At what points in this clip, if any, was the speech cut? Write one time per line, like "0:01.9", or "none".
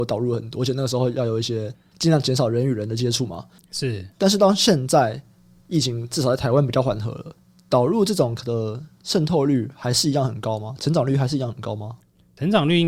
0:08.4